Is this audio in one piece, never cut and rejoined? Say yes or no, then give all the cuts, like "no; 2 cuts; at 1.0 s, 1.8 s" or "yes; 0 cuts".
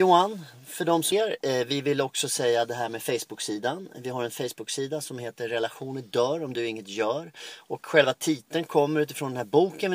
no; 1 cut; at 1.1 s